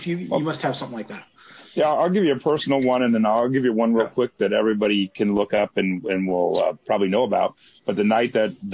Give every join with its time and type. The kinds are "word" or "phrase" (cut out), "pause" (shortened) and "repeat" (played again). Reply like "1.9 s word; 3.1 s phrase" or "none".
none

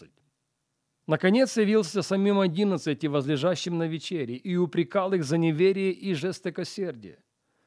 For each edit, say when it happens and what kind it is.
none

